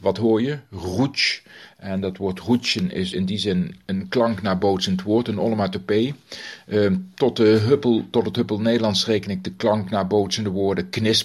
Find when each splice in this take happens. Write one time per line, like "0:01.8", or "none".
0:03.1